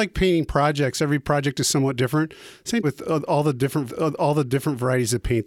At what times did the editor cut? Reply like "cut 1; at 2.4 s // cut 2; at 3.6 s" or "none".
cut 1; at 2.8 s // cut 2; at 3.9 s